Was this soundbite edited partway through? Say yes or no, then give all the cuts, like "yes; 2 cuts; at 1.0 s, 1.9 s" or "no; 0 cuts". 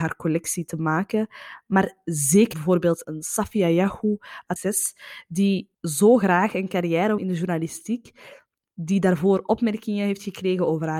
yes; 5 cuts; at 2.5 s, 3.0 s, 4.6 s, 5.7 s, 7.2 s